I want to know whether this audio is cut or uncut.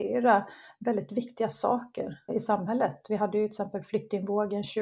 cut